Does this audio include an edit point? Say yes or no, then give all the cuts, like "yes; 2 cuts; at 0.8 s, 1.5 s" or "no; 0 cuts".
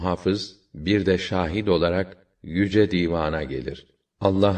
no; 0 cuts